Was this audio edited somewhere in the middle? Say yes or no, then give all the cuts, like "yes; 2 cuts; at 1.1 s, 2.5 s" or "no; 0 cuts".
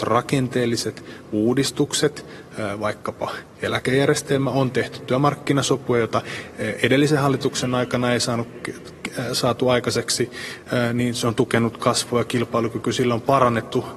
no; 0 cuts